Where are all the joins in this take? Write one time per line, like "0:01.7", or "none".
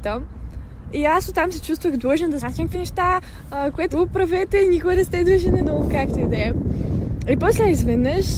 0:02.4
0:02.7
0:03.9
0:05.6